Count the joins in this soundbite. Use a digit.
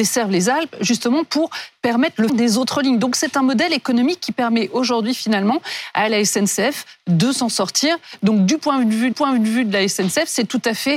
2